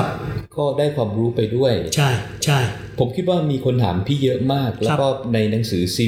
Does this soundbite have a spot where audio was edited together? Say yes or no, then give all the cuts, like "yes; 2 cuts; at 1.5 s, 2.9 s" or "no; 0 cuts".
yes; 1 cut; at 2.4 s